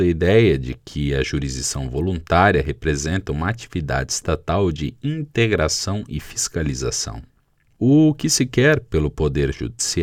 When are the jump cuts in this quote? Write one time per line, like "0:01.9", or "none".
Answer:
none